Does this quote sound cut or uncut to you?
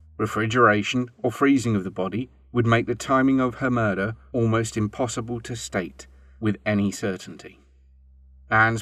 uncut